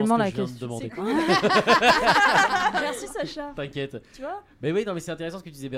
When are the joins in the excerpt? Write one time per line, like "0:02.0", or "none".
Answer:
none